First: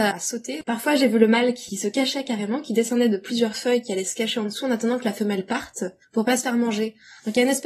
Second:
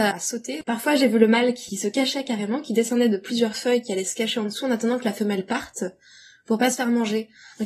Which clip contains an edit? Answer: first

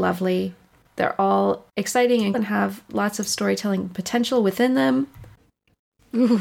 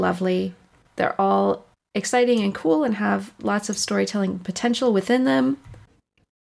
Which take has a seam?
first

